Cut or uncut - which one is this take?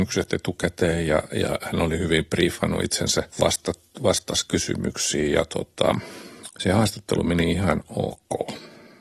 cut